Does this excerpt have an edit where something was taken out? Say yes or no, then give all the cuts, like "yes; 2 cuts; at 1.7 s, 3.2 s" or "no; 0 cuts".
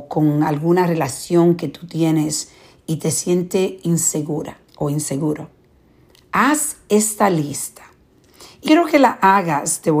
yes; 2 cuts; at 4.7 s, 8.7 s